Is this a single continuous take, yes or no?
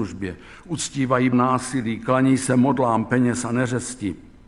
no